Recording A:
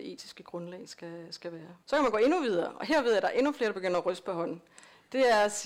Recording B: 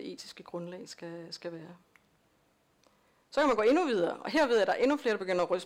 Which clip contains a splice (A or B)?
A